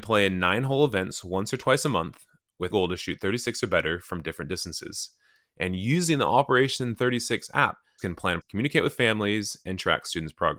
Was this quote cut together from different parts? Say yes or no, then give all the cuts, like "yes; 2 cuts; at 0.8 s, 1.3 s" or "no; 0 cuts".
yes; 3 cuts; at 2.7 s, 8.0 s, 8.4 s